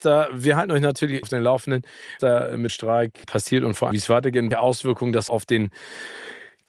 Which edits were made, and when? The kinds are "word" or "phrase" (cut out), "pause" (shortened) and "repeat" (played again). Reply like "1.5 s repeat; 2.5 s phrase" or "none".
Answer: 1.2 s word; 2.2 s word; 2.7 s word; 3.2 s word; 3.9 s word; 4.5 s word; 5.3 s word